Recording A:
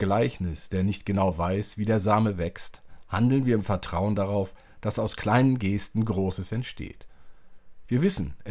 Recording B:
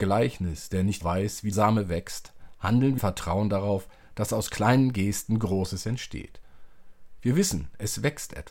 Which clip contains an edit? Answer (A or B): B